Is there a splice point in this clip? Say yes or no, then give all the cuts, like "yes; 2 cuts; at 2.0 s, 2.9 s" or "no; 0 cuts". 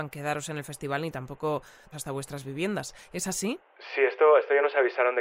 yes; 1 cut; at 1.9 s